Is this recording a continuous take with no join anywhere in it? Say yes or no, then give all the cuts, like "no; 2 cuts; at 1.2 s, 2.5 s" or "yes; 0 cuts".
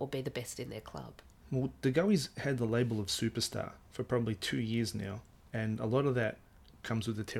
yes; 0 cuts